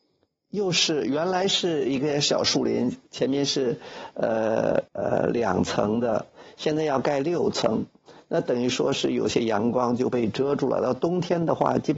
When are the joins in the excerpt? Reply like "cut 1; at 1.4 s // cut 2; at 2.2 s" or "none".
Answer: cut 1; at 4.9 s